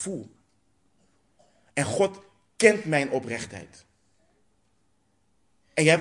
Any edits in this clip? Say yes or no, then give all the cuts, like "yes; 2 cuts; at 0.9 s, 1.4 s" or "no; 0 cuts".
no; 0 cuts